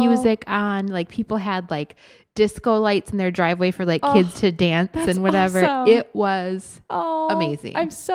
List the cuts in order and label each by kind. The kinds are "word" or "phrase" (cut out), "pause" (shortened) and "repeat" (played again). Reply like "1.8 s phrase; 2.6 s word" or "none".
none